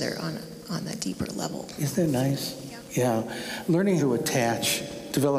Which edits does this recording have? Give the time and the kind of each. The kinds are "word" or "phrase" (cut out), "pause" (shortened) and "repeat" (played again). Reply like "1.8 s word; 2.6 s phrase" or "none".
4.0 s word